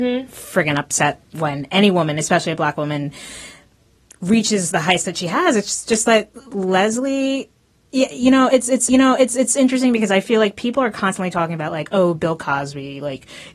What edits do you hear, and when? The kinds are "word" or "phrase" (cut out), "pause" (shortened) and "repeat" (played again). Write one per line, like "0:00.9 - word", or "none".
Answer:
0:01.3 - pause
0:07.8 - pause
0:08.9 - repeat